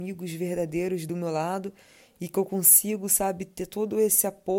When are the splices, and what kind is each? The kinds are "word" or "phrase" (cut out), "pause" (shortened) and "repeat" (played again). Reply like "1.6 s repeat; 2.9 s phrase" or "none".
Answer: none